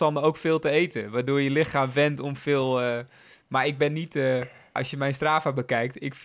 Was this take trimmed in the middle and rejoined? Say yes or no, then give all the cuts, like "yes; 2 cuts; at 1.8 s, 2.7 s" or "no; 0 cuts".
yes; 1 cut; at 4.8 s